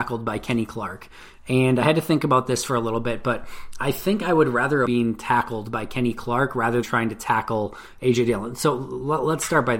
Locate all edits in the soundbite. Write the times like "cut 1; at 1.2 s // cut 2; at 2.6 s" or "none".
cut 1; at 4.9 s // cut 2; at 6.8 s